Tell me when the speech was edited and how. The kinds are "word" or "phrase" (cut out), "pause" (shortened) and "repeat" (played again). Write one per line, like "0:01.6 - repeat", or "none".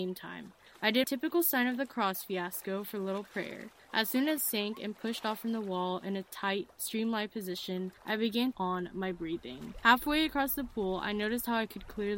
0:01.0 - word
0:04.4 - word
0:08.5 - phrase